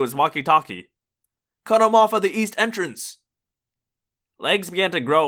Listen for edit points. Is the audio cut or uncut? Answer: uncut